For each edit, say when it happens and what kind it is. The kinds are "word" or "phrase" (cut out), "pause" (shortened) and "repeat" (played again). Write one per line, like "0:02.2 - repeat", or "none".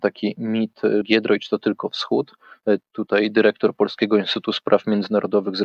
0:01.0 - word
0:02.9 - pause